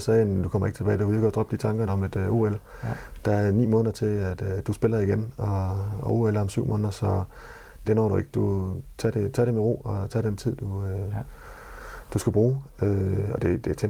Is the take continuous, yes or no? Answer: no